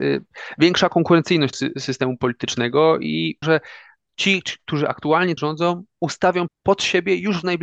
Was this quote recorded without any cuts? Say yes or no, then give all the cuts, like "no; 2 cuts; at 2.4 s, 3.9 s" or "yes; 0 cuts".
no; 4 cuts; at 1.5 s, 3.4 s, 5.4 s, 6.5 s